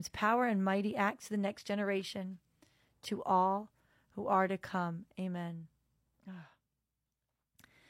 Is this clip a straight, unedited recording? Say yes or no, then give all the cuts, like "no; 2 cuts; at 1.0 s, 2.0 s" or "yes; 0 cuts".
yes; 0 cuts